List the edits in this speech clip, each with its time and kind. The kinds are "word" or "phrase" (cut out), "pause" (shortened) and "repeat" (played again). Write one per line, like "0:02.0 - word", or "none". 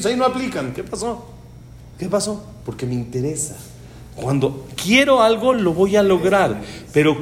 none